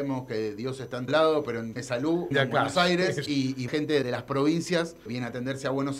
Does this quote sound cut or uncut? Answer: cut